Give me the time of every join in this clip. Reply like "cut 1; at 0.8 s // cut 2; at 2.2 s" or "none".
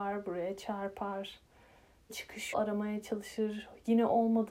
cut 1; at 2.1 s // cut 2; at 2.5 s